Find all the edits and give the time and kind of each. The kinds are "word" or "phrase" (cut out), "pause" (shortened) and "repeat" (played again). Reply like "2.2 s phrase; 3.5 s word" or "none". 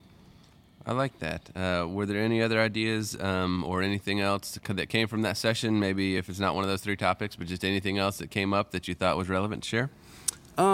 none